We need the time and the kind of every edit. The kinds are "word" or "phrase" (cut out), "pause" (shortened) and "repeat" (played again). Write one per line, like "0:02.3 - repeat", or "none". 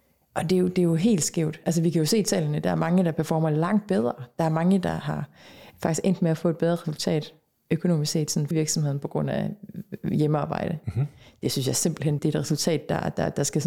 0:08.5 - word
0:12.2 - word